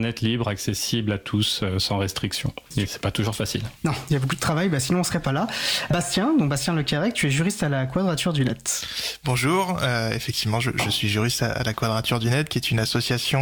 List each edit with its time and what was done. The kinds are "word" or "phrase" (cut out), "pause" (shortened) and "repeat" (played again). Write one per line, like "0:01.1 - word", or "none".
0:02.7 - pause
0:03.8 - pause